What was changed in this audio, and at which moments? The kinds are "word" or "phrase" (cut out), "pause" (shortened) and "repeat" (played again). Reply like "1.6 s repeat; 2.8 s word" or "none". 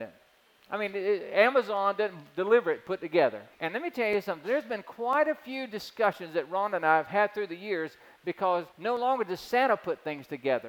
3.5 s pause; 8.7 s pause